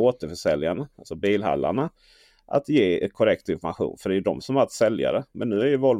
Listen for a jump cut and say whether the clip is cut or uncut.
uncut